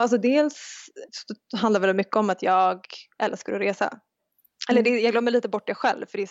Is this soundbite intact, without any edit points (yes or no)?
no